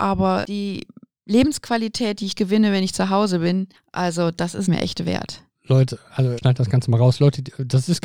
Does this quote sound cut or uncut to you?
cut